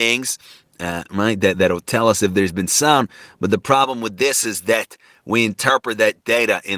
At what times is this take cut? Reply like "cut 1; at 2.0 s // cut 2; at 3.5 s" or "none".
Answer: none